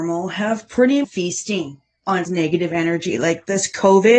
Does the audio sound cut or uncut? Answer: cut